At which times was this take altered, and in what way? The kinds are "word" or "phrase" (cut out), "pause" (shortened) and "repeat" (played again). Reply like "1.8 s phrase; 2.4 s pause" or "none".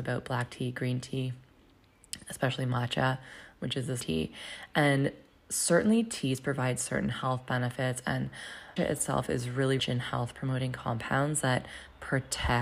4.0 s phrase; 8.8 s word; 9.8 s phrase